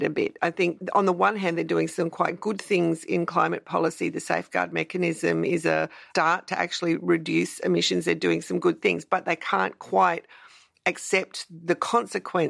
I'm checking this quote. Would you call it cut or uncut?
uncut